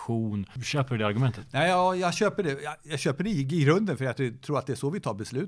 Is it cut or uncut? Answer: uncut